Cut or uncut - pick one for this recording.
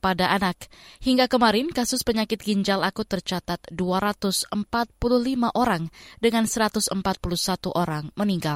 uncut